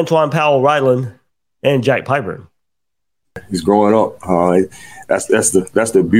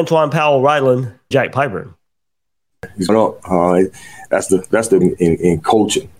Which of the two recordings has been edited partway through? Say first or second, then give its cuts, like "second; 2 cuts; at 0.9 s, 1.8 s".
second; 4 cuts; at 1.3 s, 3.1 s, 4.5 s, 5.0 s